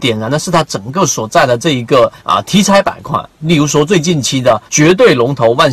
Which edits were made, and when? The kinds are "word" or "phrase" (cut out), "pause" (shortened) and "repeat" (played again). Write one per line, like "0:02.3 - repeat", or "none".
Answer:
0:02.2 - pause
0:04.7 - pause